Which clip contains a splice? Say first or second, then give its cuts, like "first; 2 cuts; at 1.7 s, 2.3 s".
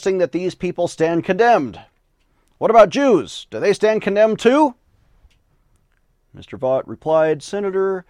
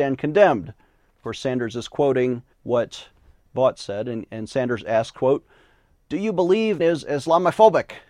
second; 2 cuts; at 2.5 s, 6.8 s